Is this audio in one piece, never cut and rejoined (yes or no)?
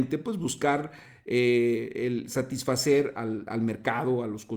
yes